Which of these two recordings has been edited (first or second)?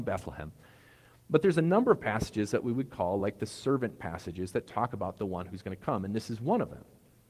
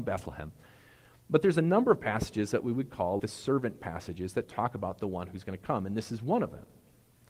second